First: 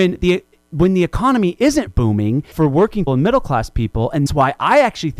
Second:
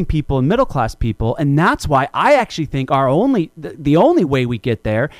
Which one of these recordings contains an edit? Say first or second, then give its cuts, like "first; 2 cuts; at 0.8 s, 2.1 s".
first; 4 cuts; at 1.9 s, 2.5 s, 3.1 s, 4.3 s